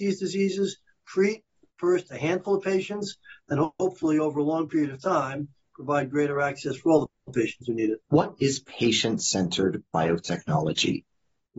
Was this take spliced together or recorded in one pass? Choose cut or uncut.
uncut